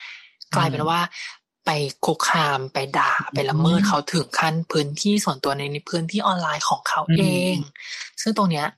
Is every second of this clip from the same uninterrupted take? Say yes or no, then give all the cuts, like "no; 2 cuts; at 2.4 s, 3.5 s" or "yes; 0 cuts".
yes; 0 cuts